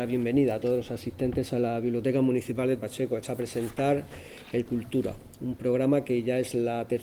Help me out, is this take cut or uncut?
cut